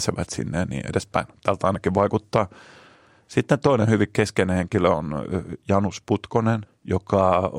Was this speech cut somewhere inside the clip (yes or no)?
yes